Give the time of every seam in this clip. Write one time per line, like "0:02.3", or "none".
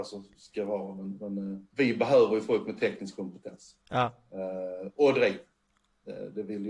0:01.7
0:03.8